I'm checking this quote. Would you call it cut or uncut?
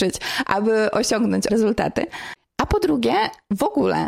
cut